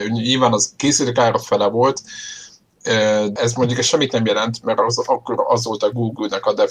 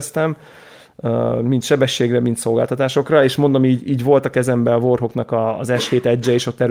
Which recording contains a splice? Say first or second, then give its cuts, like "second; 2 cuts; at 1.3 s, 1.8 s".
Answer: first; 1 cut; at 3.4 s